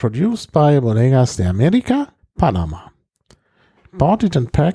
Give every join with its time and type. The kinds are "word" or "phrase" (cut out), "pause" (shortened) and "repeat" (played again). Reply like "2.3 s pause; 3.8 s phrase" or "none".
2.2 s pause